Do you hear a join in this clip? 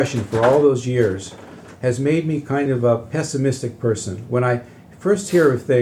no; 0 cuts

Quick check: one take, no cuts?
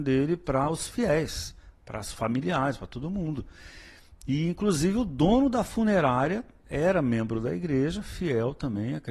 yes; 0 cuts

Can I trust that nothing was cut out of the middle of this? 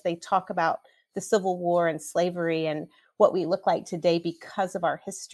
yes; 0 cuts

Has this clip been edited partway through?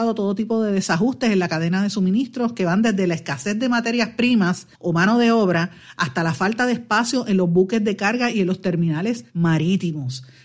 yes; 2 cuts; at 4.7 s, 9.3 s

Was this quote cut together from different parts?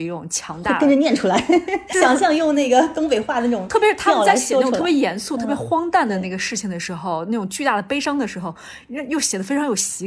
yes; 1 cut; at 1.9 s

